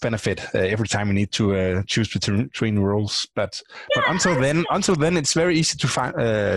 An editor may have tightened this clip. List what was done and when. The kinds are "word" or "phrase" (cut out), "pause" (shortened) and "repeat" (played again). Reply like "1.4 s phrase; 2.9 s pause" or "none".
none